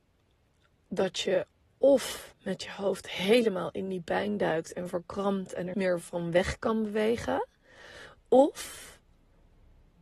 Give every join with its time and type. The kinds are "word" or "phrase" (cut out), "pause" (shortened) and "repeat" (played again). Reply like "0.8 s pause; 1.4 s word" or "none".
5.7 s word